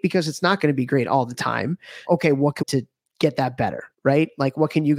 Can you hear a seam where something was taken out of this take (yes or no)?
yes